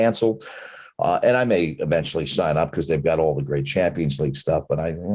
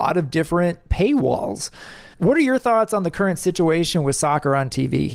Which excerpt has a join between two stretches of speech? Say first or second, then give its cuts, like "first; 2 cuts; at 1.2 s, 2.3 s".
second; 1 cut; at 2.1 s